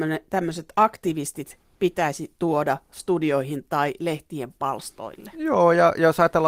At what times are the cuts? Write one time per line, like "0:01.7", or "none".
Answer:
none